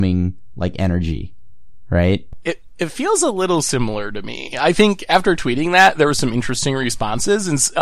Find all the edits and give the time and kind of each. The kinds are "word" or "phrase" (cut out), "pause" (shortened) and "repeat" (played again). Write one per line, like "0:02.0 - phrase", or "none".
none